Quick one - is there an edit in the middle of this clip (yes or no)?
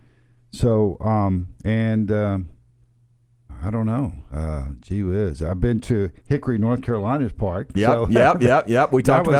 no